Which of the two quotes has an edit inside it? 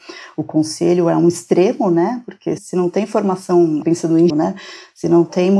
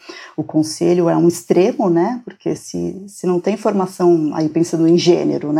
first; 3 cuts; at 2.6 s, 3.8 s, 4.3 s

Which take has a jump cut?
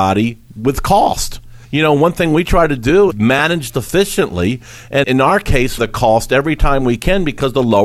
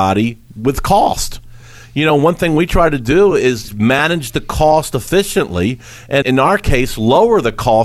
first; 4 cuts; at 1.6 s, 3.1 s, 3.7 s, 5.8 s

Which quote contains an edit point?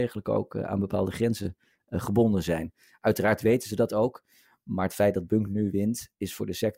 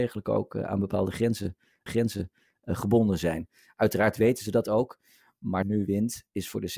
second; 2 cuts; at 1.9 s, 5.6 s

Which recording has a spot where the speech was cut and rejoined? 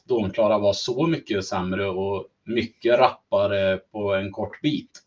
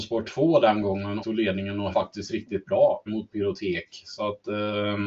second; 3 cuts; at 1.2 s, 1.9 s, 3.1 s

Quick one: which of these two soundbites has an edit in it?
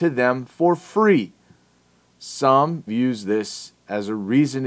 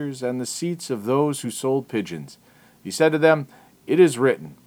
first; 1 cut; at 2.9 s

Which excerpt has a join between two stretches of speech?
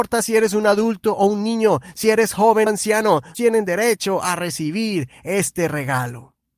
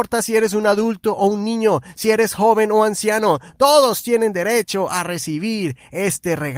first; 2 cuts; at 2.7 s, 3.3 s

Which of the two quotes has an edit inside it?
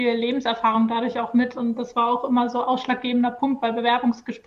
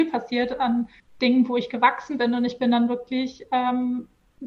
second; 1 cut; at 1.0 s

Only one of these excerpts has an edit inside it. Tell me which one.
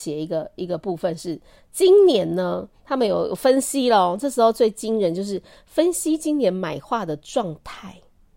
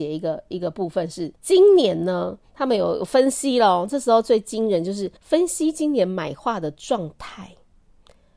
second; 2 cuts; at 1.4 s, 5.2 s

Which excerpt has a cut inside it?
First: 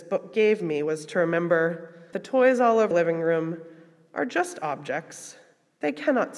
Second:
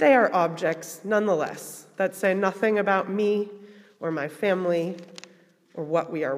first; 2 cuts; at 2.1 s, 2.9 s

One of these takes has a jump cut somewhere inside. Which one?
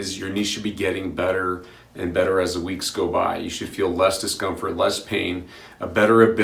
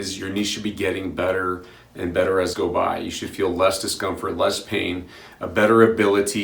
second; 1 cut; at 2.5 s

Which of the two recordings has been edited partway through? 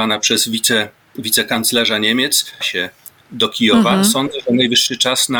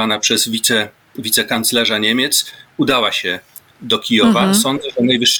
first; 1 cut; at 2.6 s

